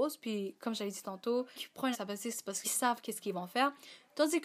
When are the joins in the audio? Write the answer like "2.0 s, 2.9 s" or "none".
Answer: 1.6 s, 1.9 s, 2.6 s

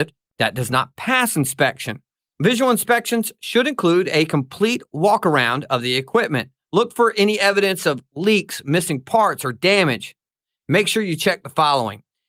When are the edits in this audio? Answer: none

